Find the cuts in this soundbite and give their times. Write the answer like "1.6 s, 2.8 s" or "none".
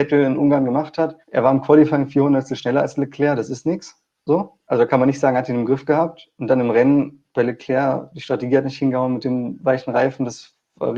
1.2 s